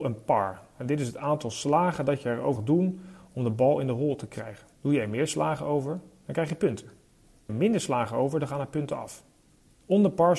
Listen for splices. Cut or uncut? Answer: cut